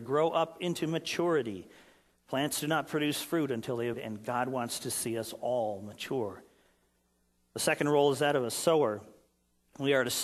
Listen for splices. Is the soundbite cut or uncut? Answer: cut